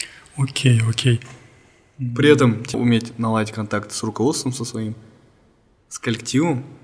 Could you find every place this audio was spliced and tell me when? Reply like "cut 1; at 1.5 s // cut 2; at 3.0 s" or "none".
cut 1; at 2.7 s